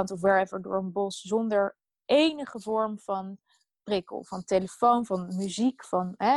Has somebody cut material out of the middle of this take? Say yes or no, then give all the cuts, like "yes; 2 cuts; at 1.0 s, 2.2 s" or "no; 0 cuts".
no; 0 cuts